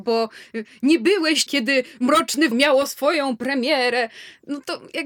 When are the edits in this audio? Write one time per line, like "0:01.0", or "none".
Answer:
0:01.5
0:02.5